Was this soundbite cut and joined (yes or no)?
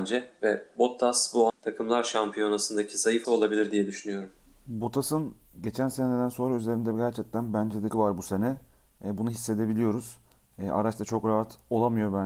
yes